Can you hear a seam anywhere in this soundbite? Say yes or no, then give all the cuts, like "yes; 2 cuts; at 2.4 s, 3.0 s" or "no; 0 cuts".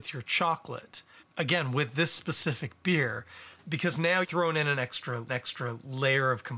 yes; 4 cuts; at 1.2 s, 3.6 s, 4.2 s, 5.3 s